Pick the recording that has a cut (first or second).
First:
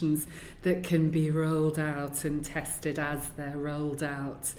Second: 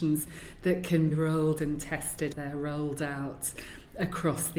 second